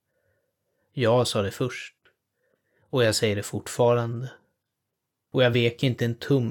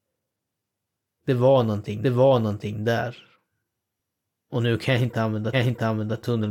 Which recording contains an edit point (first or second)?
second